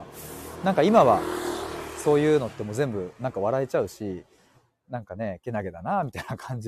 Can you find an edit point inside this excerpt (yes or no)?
no